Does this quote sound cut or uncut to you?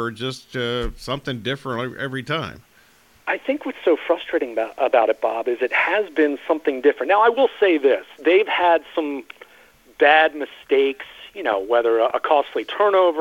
uncut